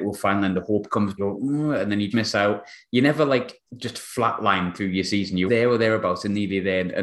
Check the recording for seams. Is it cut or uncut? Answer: cut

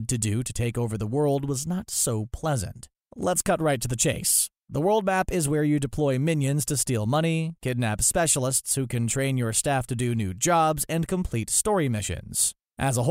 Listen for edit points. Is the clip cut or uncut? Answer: uncut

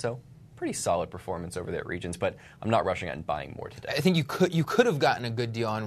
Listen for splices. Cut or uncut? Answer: uncut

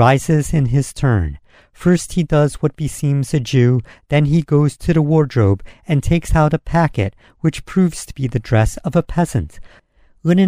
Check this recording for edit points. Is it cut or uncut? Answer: uncut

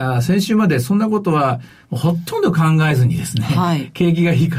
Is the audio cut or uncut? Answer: uncut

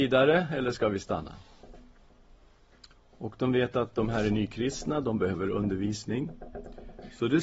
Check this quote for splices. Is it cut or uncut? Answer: uncut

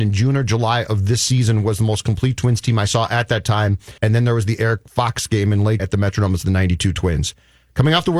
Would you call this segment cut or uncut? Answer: cut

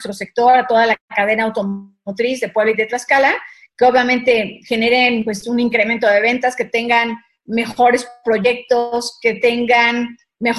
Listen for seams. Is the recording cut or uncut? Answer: uncut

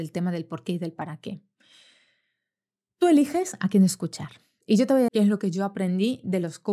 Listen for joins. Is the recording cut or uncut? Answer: cut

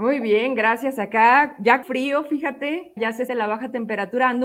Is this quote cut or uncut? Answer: cut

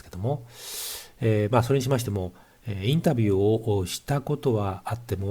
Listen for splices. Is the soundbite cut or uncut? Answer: uncut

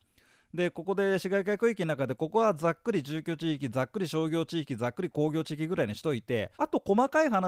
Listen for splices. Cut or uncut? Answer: cut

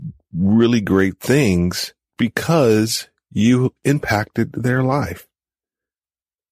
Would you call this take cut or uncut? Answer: uncut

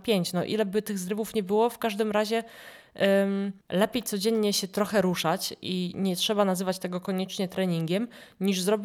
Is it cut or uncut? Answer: cut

